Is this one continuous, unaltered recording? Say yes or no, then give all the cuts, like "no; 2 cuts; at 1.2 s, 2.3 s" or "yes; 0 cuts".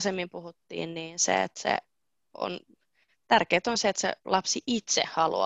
yes; 0 cuts